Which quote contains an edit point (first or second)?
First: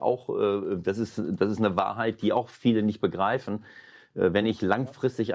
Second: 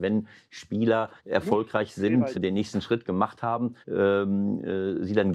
second